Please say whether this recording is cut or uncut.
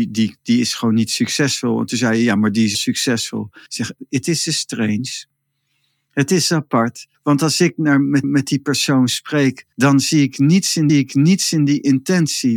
cut